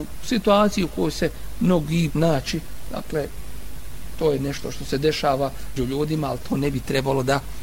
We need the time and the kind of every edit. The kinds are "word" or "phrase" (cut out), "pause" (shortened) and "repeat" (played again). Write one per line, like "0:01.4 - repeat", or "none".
0:02.1 - word
0:05.8 - word